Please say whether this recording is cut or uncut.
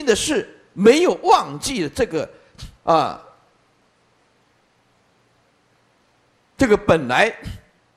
cut